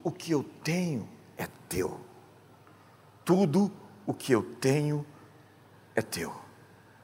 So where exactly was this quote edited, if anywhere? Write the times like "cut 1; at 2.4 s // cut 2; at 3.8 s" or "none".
none